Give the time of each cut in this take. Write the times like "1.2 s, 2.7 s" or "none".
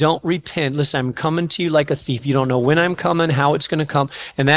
none